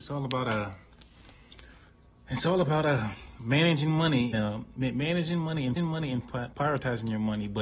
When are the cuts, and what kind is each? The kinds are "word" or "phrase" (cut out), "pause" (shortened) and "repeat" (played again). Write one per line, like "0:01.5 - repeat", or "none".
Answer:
0:04.3 - word
0:05.8 - repeat